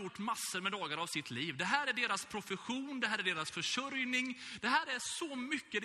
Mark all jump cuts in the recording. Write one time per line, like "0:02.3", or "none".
none